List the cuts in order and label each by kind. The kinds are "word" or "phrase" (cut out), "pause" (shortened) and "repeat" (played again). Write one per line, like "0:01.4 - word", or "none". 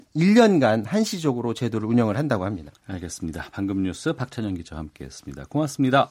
none